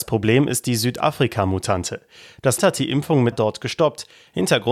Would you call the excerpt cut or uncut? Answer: cut